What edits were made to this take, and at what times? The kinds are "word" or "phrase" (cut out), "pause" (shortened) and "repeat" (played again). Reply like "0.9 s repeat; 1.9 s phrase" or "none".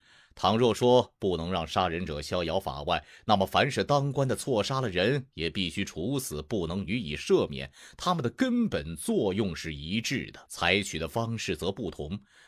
10.4 s pause